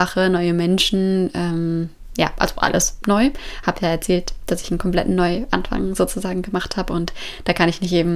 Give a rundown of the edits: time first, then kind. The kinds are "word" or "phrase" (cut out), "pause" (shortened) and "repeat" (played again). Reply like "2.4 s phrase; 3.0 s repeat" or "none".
none